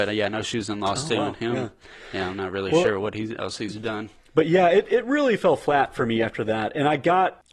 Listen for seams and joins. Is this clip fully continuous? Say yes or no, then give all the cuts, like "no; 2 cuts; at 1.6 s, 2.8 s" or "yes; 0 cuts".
yes; 0 cuts